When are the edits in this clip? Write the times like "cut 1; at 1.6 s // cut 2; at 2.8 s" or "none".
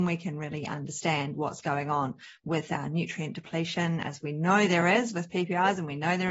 none